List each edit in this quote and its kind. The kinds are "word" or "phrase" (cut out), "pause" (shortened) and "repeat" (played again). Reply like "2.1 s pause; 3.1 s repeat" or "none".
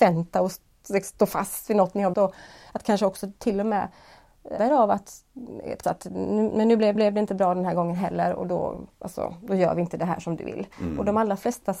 2.1 s word; 4.6 s word; 5.8 s word; 7.0 s repeat; 8.9 s pause; 10.7 s pause